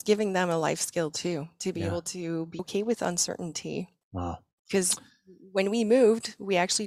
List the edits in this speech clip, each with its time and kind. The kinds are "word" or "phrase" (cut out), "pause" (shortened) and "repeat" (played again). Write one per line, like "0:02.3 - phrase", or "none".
0:02.6 - phrase